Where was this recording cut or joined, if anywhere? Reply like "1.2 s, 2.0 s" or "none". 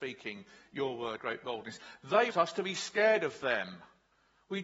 1.2 s, 2.3 s